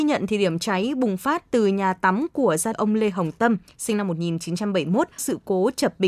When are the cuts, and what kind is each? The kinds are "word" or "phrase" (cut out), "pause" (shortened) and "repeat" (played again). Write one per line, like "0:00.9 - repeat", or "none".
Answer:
0:02.7 - word
0:05.2 - word